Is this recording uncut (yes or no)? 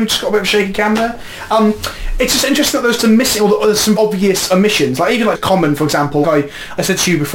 no